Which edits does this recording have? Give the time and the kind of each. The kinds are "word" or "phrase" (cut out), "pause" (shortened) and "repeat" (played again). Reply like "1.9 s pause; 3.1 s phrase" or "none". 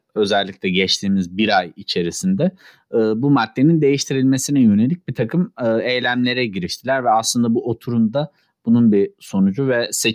none